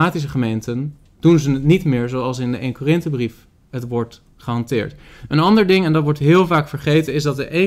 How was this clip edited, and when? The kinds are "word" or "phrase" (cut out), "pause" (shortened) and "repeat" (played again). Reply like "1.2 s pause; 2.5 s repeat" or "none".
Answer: none